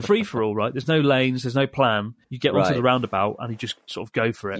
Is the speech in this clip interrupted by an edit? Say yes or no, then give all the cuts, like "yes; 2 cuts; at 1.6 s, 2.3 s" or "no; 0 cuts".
yes; 1 cut; at 2.2 s